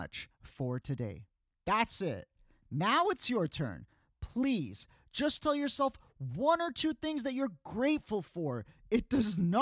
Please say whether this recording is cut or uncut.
cut